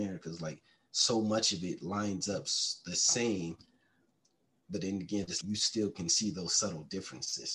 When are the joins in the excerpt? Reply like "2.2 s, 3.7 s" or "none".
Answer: 5.4 s